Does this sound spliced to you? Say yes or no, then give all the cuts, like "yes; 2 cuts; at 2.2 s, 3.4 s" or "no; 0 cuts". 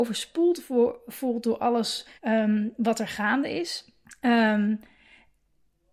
yes; 2 cuts; at 2.2 s, 4.0 s